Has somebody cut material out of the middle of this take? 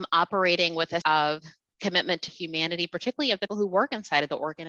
yes; 3 cuts; at 1.0 s, 2.3 s, 3.5 s

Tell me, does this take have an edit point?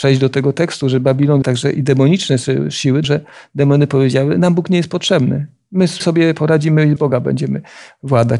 yes; 4 cuts; at 1.4 s, 3.0 s, 6.0 s, 7.0 s

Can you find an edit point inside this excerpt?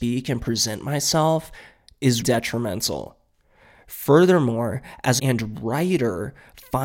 yes; 2 cuts; at 2.2 s, 5.2 s

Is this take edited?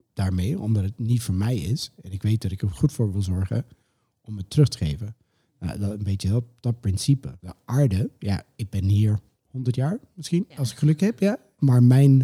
no; 0 cuts

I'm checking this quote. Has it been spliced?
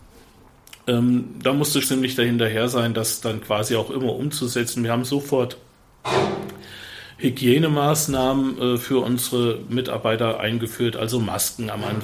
yes; 1 cut; at 1.8 s

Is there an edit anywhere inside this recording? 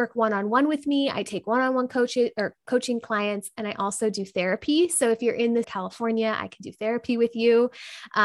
yes; 1 cut; at 5.6 s

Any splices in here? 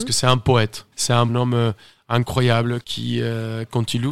yes; 3 cuts; at 0.9 s, 1.3 s, 2.8 s

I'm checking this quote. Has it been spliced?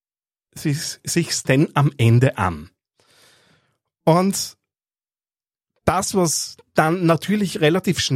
no; 0 cuts

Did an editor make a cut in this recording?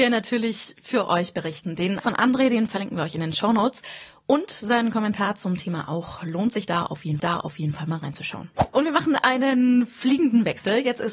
yes; 2 cuts; at 2.0 s, 7.2 s

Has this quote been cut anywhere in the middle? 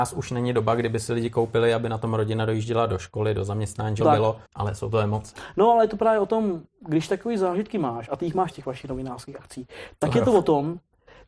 yes; 3 cuts; at 4.0 s, 4.5 s, 8.5 s

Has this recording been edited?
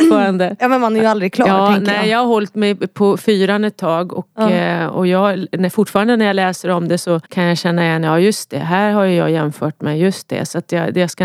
yes; 1 cut; at 7.2 s

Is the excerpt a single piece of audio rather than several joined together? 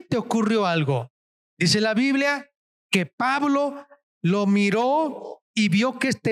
yes; 0 cuts

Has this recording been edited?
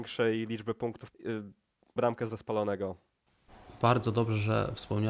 yes; 3 cuts; at 1.1 s, 2.0 s, 2.3 s

